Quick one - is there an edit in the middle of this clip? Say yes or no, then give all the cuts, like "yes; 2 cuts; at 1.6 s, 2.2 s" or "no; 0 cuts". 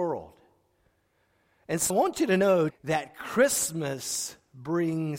yes; 2 cuts; at 1.9 s, 2.7 s